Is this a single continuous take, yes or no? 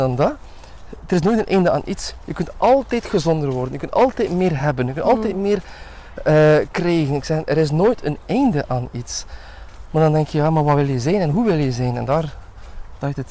yes